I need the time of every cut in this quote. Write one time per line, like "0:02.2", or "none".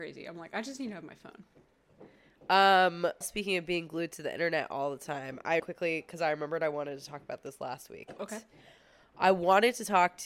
0:03.2
0:05.6
0:08.2